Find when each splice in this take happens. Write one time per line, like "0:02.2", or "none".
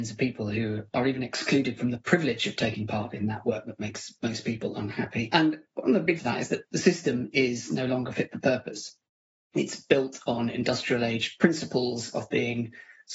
0:06.2